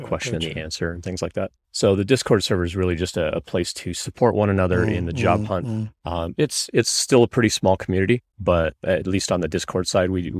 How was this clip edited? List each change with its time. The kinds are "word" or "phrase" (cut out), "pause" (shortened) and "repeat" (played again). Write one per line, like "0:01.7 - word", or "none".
0:01.6 - pause
0:08.3 - pause